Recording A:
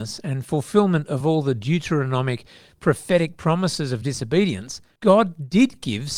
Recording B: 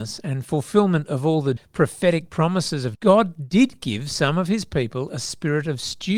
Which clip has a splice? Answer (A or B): B